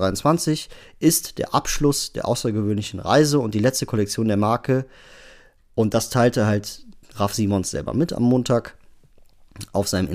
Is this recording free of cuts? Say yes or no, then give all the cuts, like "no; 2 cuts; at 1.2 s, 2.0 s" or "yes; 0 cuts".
yes; 0 cuts